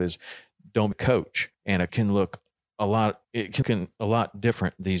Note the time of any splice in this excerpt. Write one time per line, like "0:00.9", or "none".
0:00.9
0:01.5
0:01.9
0:03.2
0:03.6